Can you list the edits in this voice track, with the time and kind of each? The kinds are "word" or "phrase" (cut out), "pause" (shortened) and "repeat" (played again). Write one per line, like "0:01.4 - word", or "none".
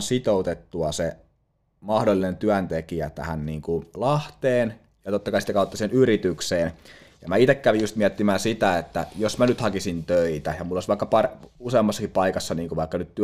none